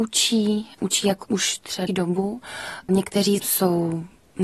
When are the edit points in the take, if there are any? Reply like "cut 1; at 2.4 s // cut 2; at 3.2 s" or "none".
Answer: cut 1; at 1.2 s // cut 2; at 1.9 s // cut 3; at 3.4 s

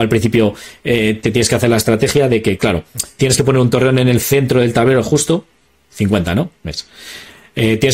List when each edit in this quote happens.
cut 1; at 6.6 s

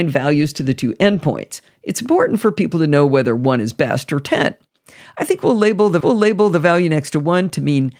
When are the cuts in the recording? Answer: cut 1; at 6.0 s

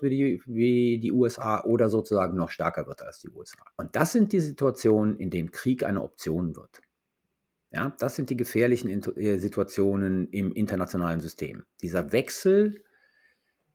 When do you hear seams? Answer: cut 1; at 3.7 s // cut 2; at 7.2 s

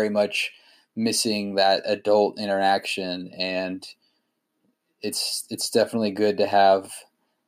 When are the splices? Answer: none

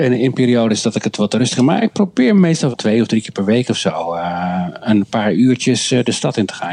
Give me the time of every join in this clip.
cut 1; at 2.7 s

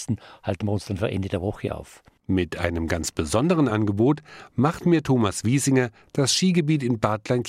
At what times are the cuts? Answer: none

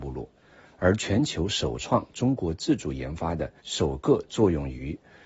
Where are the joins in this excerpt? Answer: cut 1; at 3.6 s

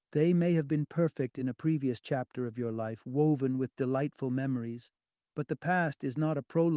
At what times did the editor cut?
none

